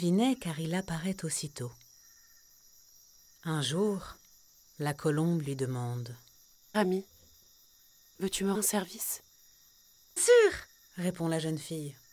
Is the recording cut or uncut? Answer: cut